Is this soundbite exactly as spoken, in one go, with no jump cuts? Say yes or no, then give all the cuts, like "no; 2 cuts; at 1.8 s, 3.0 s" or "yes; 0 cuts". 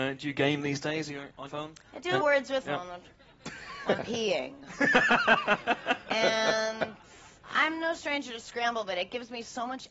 no; 6 cuts; at 1.5 s, 2.2 s, 2.6 s, 3.1 s, 4.0 s, 7.4 s